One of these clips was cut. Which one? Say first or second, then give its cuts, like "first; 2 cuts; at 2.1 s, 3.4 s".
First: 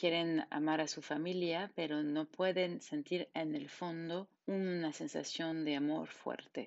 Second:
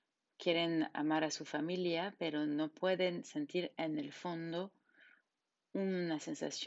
first; 1 cut; at 4.4 s